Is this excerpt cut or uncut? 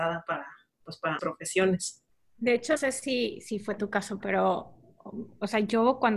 cut